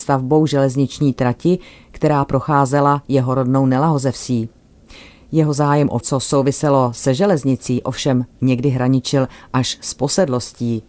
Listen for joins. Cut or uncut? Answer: cut